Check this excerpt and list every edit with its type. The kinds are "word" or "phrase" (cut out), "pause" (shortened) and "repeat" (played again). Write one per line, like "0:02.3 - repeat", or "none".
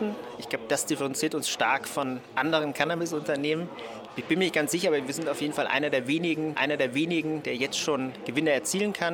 0:06.5 - repeat